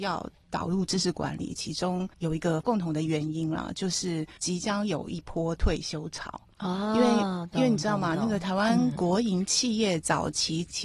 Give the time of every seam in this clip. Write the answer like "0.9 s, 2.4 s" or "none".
2.1 s, 4.4 s